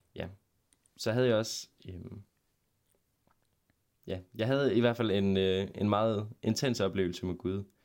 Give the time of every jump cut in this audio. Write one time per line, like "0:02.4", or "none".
0:01.8